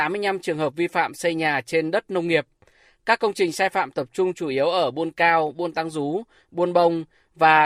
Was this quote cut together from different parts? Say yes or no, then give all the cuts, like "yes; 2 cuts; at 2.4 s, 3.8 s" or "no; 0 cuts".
no; 0 cuts